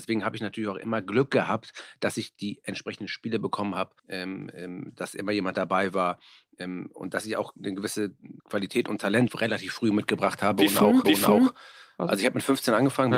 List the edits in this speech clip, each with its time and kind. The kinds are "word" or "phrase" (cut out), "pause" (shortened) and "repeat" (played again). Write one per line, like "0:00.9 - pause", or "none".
0:04.0 - pause
0:08.4 - pause
0:09.3 - word
0:11.0 - repeat